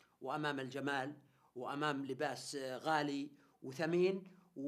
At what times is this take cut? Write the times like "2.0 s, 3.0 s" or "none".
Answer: none